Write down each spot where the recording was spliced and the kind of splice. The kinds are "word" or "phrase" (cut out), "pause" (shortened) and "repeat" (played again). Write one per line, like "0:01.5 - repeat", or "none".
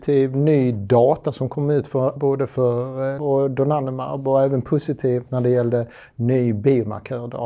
0:02.2 - word
0:03.2 - word